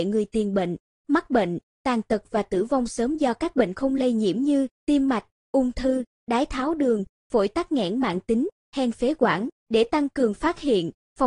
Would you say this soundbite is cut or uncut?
cut